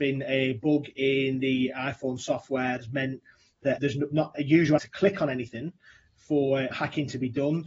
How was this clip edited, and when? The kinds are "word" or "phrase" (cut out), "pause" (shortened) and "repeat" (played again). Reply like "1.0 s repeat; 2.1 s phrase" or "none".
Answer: 2.8 s word; 3.8 s word; 4.3 s word; 4.8 s word; 6.7 s word